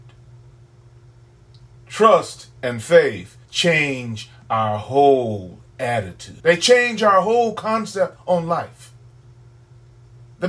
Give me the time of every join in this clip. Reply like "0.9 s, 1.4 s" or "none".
3.5 s, 6.4 s